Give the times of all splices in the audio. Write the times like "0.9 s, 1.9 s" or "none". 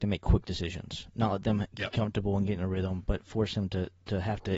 none